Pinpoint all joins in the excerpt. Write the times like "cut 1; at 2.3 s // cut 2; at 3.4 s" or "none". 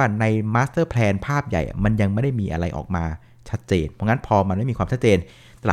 none